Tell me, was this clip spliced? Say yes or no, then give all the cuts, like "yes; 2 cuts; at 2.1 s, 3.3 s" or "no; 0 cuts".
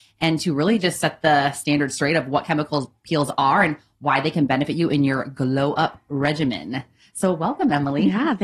no; 0 cuts